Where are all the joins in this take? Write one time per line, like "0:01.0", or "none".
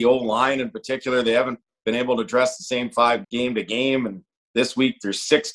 0:03.2